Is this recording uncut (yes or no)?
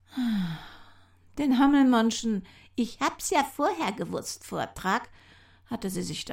yes